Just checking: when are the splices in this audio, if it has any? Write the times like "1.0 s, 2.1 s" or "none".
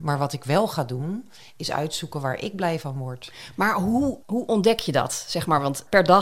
4.2 s